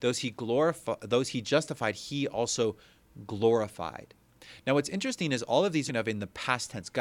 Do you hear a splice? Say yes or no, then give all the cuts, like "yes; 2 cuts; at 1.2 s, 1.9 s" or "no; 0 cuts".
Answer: yes; 1 cut; at 5.9 s